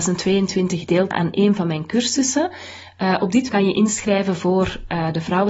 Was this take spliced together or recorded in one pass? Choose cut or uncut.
cut